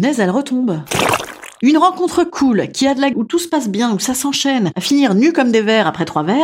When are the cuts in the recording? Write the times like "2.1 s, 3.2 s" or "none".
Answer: 3.1 s